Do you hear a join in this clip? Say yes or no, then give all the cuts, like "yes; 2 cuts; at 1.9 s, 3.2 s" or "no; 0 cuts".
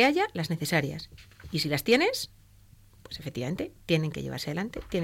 no; 0 cuts